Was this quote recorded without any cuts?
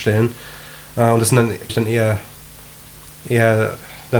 no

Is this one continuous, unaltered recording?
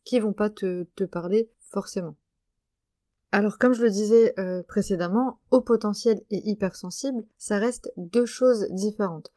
no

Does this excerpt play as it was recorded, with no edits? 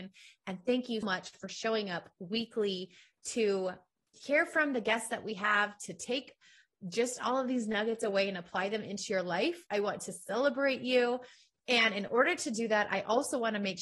no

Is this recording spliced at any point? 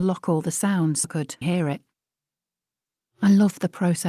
yes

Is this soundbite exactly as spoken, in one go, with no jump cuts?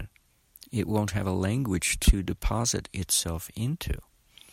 yes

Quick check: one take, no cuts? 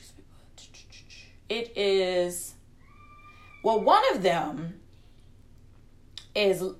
yes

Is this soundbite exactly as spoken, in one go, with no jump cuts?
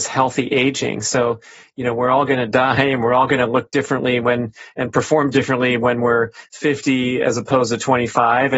yes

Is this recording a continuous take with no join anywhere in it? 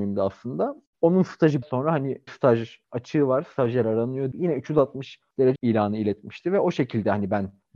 no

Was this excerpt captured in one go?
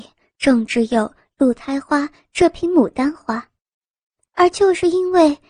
yes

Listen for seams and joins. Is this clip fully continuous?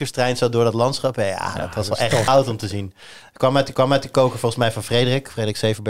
no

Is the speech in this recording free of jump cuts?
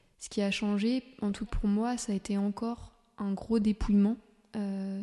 no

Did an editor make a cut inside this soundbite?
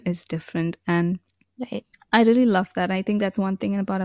no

